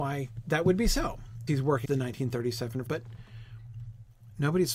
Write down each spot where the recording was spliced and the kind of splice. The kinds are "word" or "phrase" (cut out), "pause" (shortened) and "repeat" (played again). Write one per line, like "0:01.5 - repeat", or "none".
0:01.5 - word
0:01.8 - word
0:02.9 - word